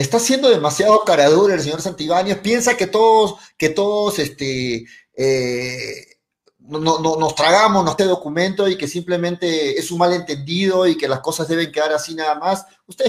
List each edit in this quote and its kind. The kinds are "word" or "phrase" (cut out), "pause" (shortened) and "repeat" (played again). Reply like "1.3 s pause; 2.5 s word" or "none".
8.0 s phrase